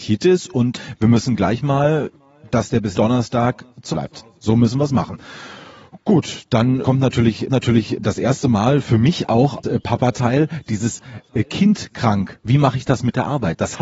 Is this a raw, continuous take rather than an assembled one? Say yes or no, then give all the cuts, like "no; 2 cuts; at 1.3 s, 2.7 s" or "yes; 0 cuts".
no; 5 cuts; at 2.9 s, 3.9 s, 6.8 s, 7.5 s, 9.6 s